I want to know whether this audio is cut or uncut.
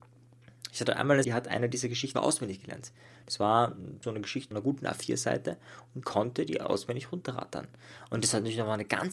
cut